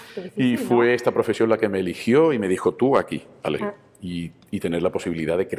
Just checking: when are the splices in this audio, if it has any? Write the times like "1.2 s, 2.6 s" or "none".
3.6 s